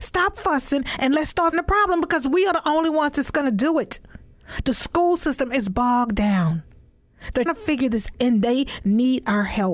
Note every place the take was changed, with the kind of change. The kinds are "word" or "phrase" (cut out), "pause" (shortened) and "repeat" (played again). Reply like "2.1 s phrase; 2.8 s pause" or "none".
1.5 s word; 7.5 s word; 8.1 s word